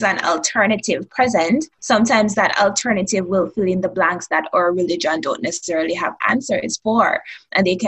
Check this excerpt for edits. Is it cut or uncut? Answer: cut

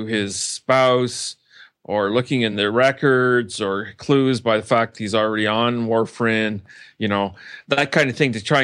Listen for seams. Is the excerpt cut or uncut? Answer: uncut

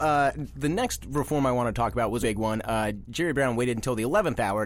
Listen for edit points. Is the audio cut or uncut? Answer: cut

